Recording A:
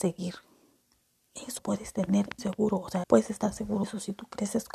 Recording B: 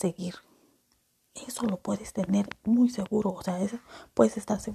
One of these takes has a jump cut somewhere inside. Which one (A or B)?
A